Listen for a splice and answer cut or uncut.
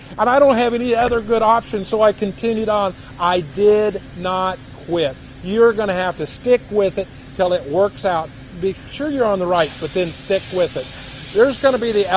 cut